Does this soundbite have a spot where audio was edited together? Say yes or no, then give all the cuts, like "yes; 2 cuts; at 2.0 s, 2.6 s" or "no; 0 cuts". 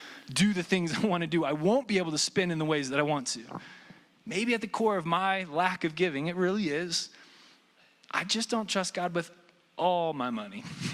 no; 0 cuts